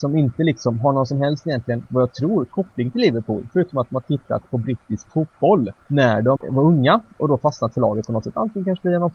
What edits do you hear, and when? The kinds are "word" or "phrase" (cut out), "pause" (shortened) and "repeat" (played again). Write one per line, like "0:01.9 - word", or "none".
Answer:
0:06.4 - word